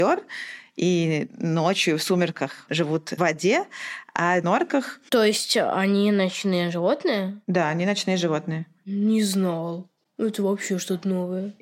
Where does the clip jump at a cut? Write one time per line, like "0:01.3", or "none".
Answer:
0:02.7
0:03.2
0:04.4